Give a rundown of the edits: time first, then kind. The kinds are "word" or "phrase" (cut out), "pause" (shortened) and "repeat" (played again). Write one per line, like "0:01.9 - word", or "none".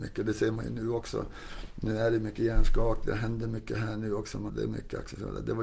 0:04.5 - word